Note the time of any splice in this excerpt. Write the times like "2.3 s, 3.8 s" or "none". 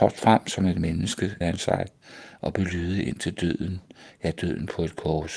1.4 s